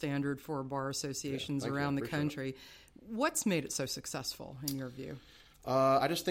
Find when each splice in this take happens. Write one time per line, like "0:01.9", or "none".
none